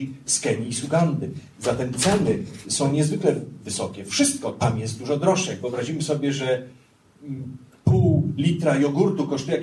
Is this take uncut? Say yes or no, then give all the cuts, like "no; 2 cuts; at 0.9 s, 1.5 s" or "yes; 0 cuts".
yes; 0 cuts